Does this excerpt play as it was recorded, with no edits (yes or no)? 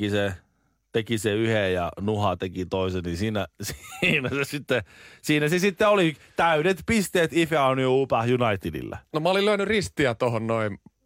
yes